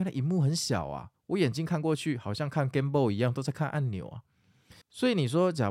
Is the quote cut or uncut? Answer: cut